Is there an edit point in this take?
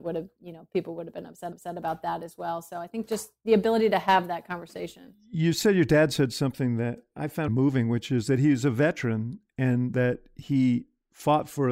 yes; 2 cuts; at 1.5 s, 7.5 s

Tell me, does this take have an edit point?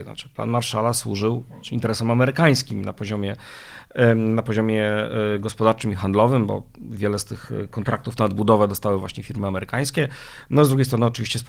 no; 0 cuts

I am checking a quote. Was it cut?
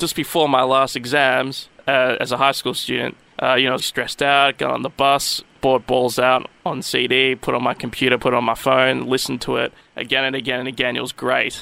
yes; 1 cut; at 3.8 s

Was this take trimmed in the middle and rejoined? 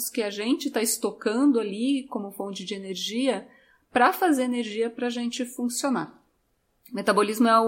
no; 0 cuts

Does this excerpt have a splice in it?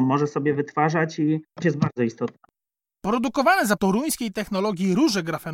yes; 3 cuts; at 1.6 s, 2.7 s, 3.8 s

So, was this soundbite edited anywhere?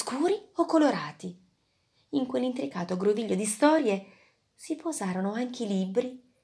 no; 0 cuts

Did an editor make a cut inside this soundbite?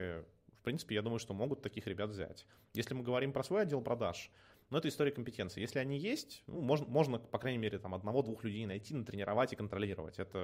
no; 0 cuts

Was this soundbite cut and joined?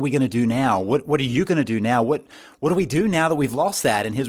no; 0 cuts

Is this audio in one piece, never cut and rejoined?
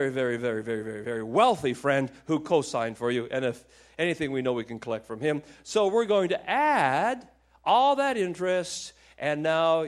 yes; 0 cuts

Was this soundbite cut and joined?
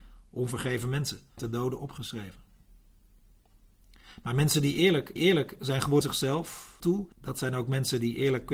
yes; 5 cuts; at 1.4 s, 5.2 s, 6.0 s, 6.8 s, 7.1 s

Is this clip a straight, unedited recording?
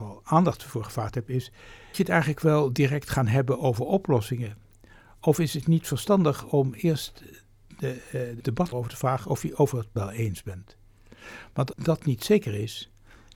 no; 5 cuts; at 1.9 s, 8.4 s, 8.7 s, 10.0 s, 11.7 s

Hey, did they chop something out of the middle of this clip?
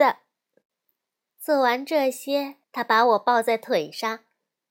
yes; 1 cut; at 2.6 s

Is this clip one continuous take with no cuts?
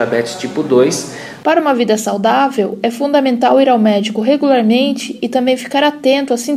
yes; 0 cuts

